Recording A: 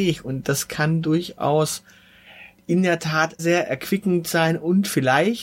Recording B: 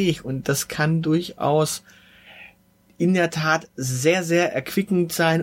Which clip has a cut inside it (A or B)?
A